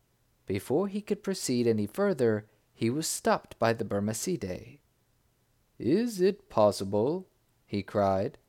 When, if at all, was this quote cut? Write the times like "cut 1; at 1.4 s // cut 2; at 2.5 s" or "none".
none